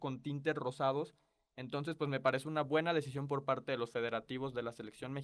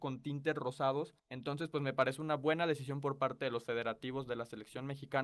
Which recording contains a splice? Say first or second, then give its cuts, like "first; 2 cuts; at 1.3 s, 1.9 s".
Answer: second; 1 cut; at 1.2 s